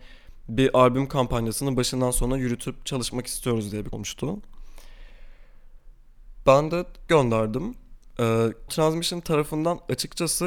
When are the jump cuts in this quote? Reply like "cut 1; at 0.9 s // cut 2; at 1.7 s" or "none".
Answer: cut 1; at 3.9 s // cut 2; at 7.1 s // cut 3; at 8.7 s